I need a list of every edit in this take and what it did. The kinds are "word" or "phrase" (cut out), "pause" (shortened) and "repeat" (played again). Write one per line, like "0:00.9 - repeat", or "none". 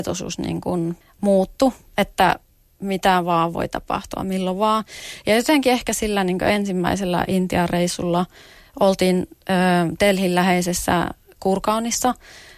0:01.0 - pause